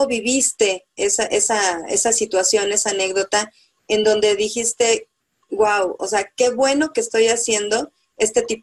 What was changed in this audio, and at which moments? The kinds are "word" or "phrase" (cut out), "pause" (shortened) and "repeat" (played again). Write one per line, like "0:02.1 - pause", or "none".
none